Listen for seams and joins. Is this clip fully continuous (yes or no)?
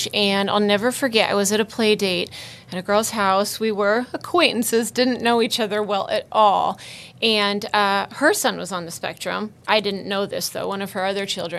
yes